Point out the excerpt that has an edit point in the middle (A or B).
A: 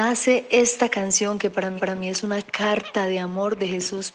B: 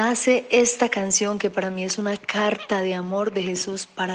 A